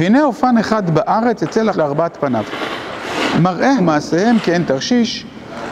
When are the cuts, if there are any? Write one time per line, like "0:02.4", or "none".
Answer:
0:01.7
0:03.8

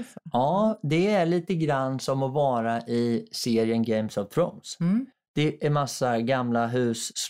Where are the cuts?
0:05.1

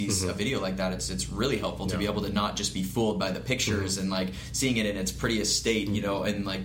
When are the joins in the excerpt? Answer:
none

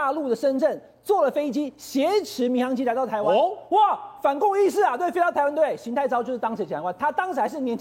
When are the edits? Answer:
none

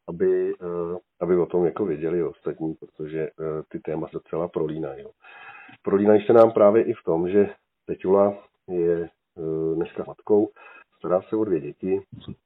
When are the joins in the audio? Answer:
0:01.1
0:04.1
0:10.1

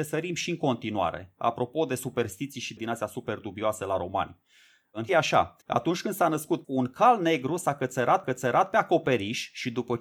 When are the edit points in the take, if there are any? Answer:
0:02.8
0:05.1
0:05.6
0:06.6
0:08.2

